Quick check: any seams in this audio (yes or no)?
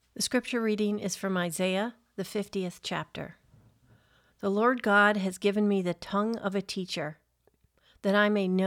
no